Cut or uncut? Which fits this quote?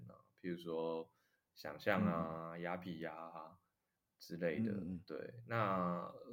uncut